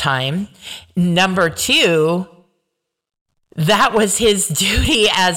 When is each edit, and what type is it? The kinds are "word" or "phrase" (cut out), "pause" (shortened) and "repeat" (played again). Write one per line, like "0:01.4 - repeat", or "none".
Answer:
none